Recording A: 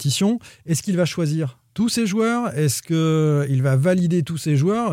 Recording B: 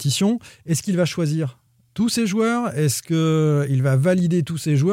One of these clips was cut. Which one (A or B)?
A